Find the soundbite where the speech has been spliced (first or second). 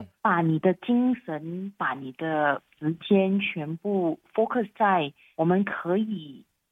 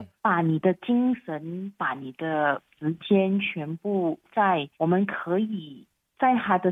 second